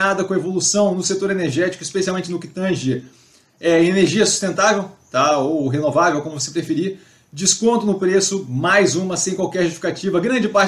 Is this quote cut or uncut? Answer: uncut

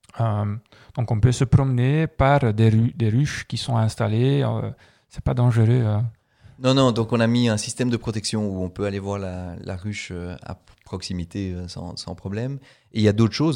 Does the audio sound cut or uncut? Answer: uncut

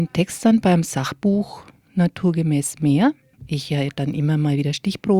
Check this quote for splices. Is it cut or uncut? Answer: cut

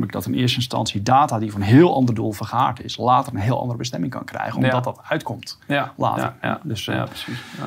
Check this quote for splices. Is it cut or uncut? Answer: uncut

